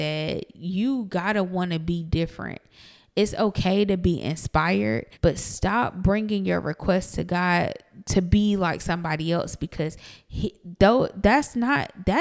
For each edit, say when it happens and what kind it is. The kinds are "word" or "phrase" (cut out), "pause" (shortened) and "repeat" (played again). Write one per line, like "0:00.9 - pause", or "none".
0:05.1 - pause